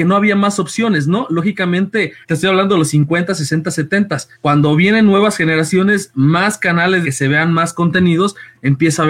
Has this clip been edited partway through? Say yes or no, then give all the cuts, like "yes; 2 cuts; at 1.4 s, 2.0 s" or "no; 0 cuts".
yes; 3 cuts; at 2.2 s, 4.3 s, 7.0 s